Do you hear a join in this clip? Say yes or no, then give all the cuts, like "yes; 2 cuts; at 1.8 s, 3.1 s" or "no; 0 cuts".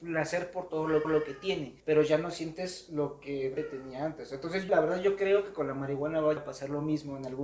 yes; 5 cuts; at 1.0 s, 1.8 s, 3.6 s, 4.7 s, 6.4 s